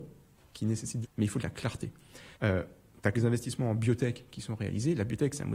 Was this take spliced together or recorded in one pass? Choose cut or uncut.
cut